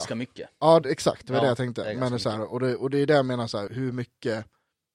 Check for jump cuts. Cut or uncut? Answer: cut